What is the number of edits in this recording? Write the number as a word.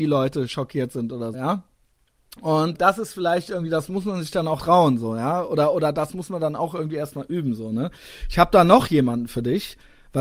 three